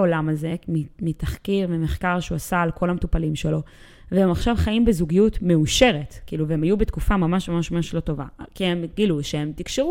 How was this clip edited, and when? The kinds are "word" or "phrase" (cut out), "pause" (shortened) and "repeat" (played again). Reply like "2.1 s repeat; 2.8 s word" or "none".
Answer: none